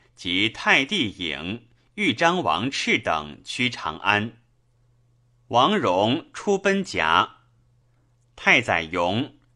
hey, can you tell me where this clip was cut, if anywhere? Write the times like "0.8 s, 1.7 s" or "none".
none

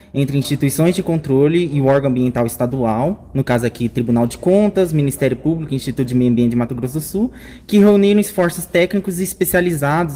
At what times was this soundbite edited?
none

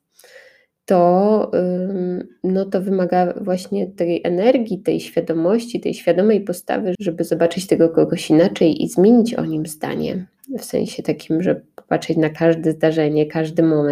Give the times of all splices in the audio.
6.9 s

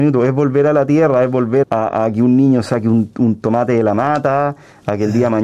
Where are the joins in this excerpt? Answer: 1.6 s

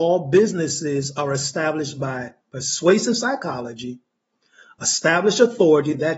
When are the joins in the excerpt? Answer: none

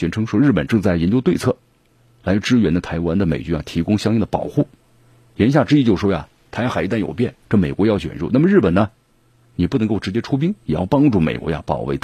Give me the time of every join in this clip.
none

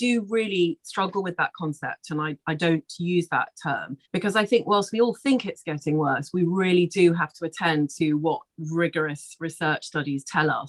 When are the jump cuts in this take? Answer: 4.0 s

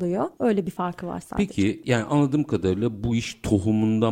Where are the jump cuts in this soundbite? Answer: none

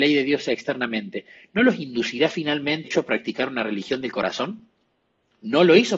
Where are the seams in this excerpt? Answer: 2.8 s

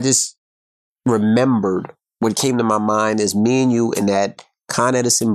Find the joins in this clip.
none

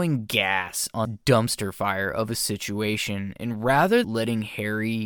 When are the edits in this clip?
1.0 s, 4.0 s

